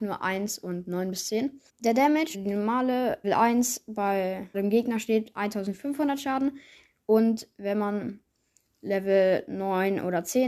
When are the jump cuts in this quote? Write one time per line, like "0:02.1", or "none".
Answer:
0:01.7
0:02.3
0:03.2
0:04.5

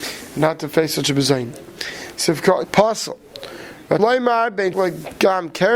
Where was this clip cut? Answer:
0:02.6
0:04.0
0:04.7

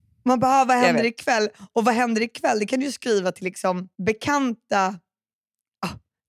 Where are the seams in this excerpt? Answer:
0:03.9

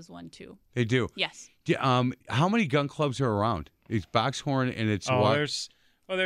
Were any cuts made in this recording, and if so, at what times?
0:02.2
0:03.8

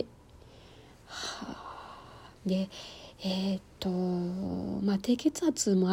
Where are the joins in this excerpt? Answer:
0:02.4

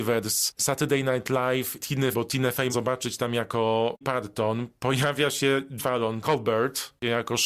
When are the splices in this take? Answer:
0:01.8
0:02.1
0:02.7
0:04.0
0:05.8
0:06.2

